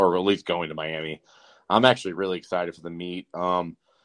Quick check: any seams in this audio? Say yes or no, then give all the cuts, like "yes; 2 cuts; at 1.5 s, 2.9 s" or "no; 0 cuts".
no; 0 cuts